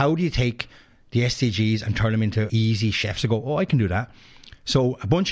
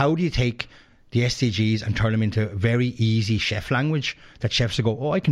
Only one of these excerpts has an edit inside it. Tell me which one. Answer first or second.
first